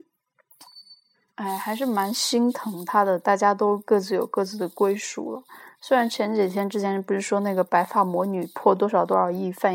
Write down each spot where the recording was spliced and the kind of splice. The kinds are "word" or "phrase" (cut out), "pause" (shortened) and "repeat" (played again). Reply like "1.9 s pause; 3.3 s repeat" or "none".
none

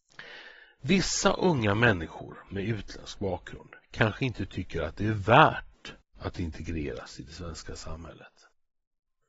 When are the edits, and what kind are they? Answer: 3.8 s pause

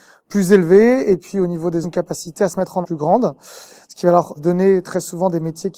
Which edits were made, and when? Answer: 1.8 s word; 2.8 s word; 4.4 s word

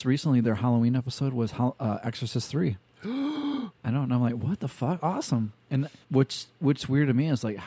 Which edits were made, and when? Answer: 6.0 s pause

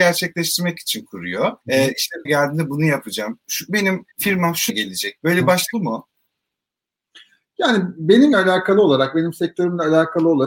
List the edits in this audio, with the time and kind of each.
1.6 s pause; 2.3 s phrase; 4.1 s pause; 4.7 s word; 5.2 s word; 5.7 s phrase; 8.3 s word

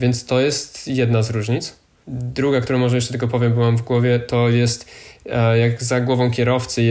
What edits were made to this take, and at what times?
none

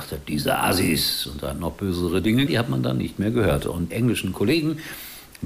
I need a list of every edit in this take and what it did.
2.5 s phrase; 3.9 s word

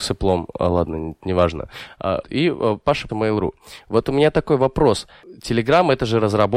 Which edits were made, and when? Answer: 2.2 s word; 3.1 s word

